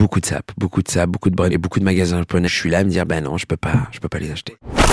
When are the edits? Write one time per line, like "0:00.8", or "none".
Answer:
0:01.5
0:02.5